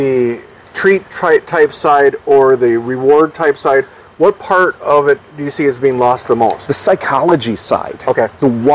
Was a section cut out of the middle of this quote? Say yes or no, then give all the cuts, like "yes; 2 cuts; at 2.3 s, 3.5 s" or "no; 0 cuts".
no; 0 cuts